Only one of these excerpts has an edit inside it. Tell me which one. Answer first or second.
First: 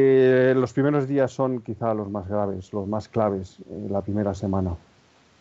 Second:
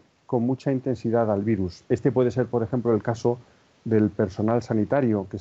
second